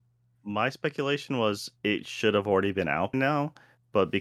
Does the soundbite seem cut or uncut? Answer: cut